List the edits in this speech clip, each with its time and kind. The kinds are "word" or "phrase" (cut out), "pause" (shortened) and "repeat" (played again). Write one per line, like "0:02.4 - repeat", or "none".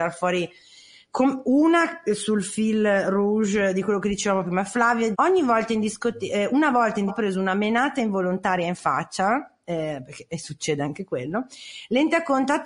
0:05.1 - word
0:07.1 - word